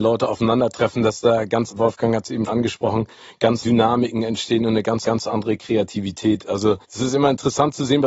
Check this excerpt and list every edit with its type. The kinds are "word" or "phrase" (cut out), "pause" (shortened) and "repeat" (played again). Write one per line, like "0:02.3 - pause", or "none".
0:01.7 - word
0:02.5 - word
0:03.6 - word
0:05.0 - repeat
0:06.8 - pause